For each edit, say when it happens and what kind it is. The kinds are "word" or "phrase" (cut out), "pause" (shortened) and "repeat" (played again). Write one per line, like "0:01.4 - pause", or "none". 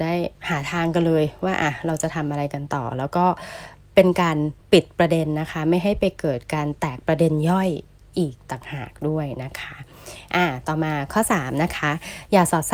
0:04.6 - pause